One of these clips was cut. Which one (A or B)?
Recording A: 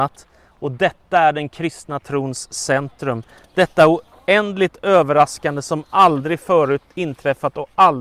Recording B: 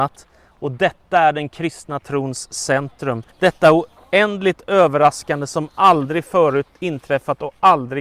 B